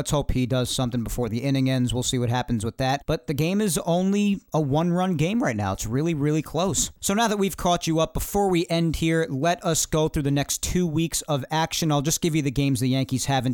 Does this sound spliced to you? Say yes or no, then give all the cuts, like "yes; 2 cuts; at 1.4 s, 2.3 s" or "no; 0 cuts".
no; 0 cuts